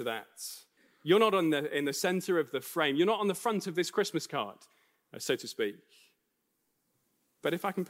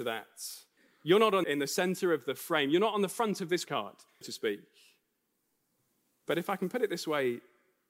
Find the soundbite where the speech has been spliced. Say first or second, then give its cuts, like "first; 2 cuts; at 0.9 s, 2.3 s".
second; 3 cuts; at 1.4 s, 3.6 s, 4.2 s